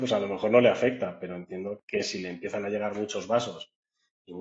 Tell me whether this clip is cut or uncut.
uncut